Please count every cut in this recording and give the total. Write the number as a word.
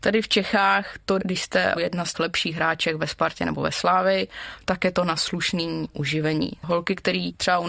three